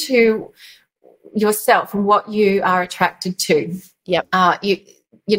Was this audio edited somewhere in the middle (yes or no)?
no